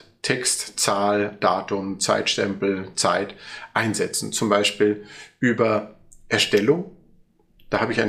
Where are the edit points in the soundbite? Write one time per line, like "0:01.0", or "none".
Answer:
none